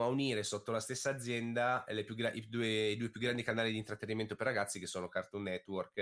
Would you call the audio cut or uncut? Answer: uncut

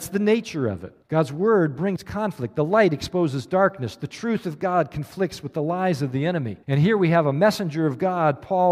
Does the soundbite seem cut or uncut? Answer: cut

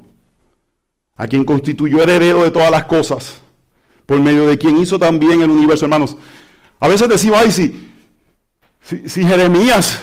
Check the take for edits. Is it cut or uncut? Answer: uncut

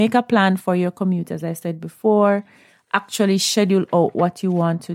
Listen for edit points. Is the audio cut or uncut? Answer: uncut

